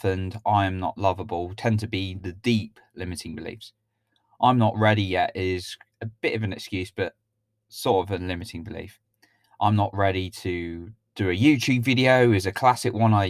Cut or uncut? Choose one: uncut